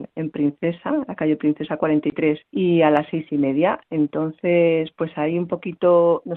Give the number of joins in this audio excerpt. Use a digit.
1